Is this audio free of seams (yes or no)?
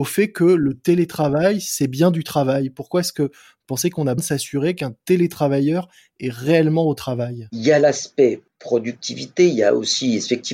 no